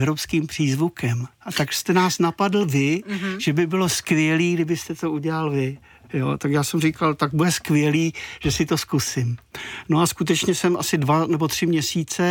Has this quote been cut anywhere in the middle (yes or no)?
no